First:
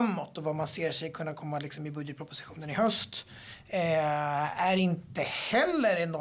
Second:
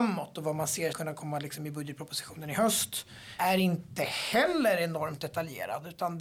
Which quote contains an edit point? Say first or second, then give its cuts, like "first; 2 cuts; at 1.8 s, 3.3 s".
second; 2 cuts; at 0.9 s, 3.4 s